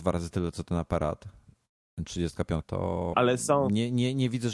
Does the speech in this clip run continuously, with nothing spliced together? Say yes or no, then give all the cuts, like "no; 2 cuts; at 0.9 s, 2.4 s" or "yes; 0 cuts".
no; 2 cuts; at 2.6 s, 3.1 s